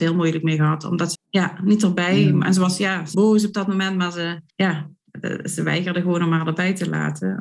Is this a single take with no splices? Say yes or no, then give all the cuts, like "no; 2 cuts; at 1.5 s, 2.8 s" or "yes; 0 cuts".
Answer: no; 3 cuts; at 1.1 s, 3.1 s, 4.5 s